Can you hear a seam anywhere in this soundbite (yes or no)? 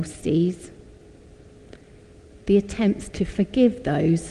no